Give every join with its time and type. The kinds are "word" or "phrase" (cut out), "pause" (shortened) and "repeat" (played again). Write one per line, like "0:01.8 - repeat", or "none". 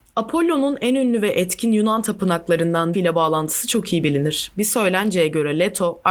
0:02.9 - word